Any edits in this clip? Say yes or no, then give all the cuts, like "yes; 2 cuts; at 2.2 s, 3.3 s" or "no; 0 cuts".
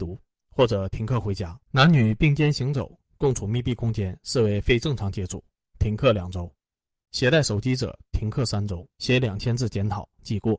yes; 2 cuts; at 1.6 s, 8.9 s